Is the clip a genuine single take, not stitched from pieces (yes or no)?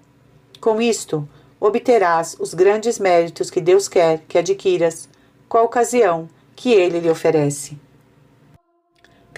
yes